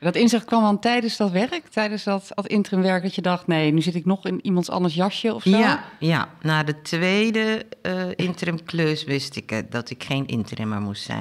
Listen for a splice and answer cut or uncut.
uncut